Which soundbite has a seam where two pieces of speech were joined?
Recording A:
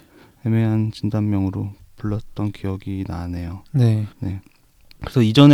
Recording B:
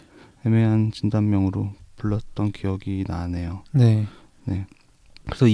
A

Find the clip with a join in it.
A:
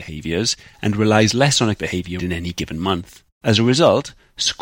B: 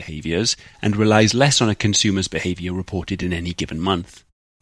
A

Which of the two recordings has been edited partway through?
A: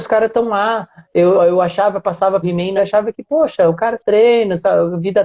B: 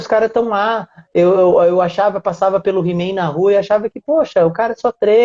A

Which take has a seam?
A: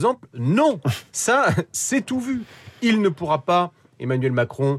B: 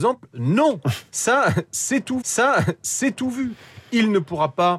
B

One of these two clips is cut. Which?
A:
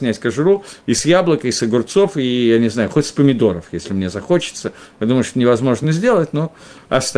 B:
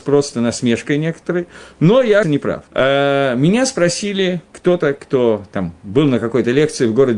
B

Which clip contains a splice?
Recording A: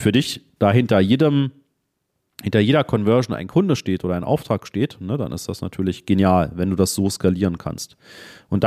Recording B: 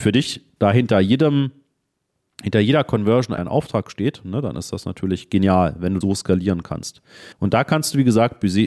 B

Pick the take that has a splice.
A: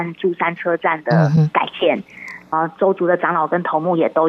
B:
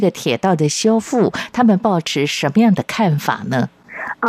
A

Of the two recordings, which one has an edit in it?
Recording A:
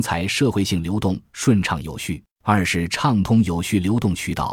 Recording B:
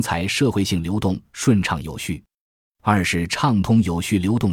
A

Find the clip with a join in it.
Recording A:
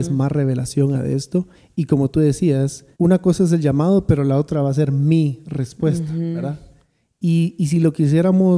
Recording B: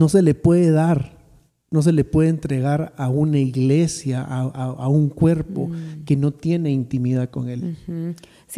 A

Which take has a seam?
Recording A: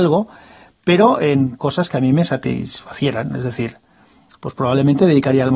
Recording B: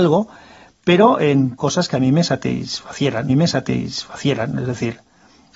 B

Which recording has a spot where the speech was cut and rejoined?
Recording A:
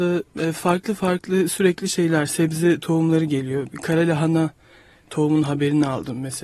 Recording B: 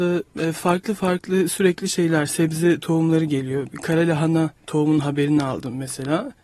B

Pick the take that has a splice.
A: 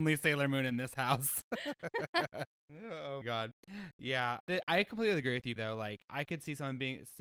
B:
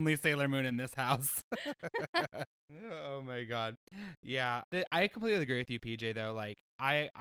A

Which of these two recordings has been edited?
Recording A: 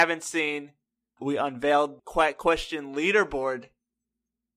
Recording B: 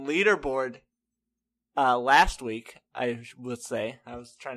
A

